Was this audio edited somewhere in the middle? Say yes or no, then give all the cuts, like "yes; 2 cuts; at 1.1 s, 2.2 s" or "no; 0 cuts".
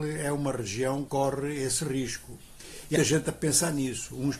yes; 2 cuts; at 1.1 s, 3.0 s